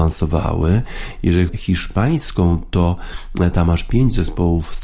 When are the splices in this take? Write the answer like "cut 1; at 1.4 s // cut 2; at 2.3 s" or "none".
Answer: cut 1; at 1.5 s